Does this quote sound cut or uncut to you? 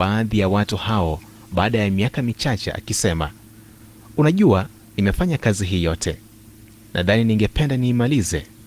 uncut